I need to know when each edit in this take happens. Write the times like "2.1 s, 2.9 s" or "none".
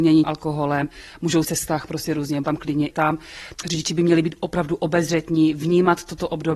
1.4 s, 2.4 s, 2.9 s

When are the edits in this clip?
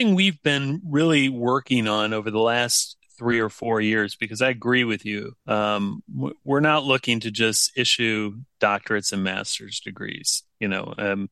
5.4 s

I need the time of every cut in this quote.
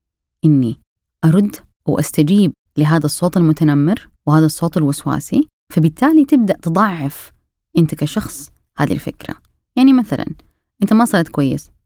4.2 s

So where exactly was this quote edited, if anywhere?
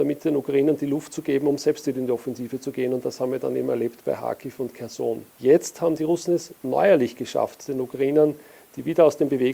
5.3 s

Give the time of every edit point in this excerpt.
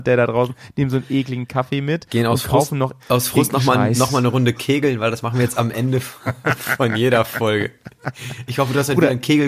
3.0 s

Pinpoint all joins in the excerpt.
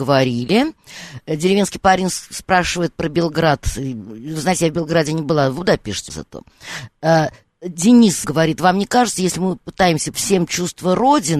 6.1 s, 8.2 s, 10.1 s

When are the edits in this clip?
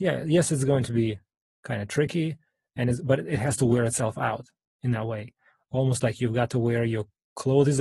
none

